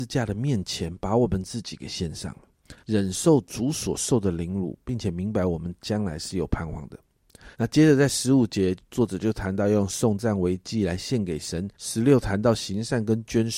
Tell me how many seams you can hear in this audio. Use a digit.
3